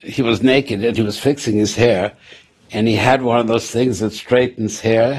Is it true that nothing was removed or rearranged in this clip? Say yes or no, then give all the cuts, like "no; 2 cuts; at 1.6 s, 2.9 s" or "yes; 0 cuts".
yes; 0 cuts